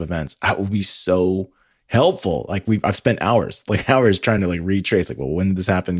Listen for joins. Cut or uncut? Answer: uncut